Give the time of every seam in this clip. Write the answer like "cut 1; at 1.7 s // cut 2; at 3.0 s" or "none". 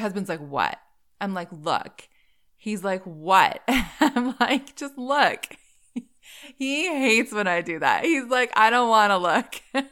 none